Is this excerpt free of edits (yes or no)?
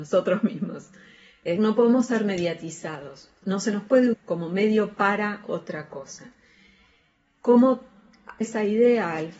no